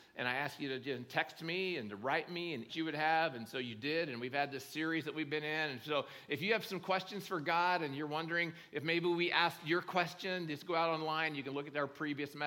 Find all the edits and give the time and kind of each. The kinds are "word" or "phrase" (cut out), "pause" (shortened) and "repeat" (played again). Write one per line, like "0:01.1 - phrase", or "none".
0:02.7 - phrase